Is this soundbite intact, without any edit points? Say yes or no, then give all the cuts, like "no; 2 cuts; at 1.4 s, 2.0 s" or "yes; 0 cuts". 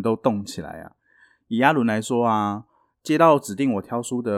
yes; 0 cuts